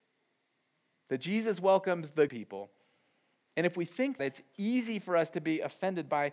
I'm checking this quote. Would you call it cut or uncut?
cut